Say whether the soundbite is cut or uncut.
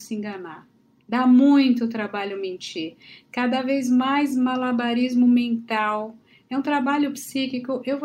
uncut